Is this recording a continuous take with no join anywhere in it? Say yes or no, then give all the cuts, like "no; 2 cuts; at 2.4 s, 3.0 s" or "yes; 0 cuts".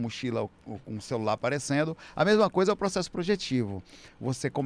yes; 0 cuts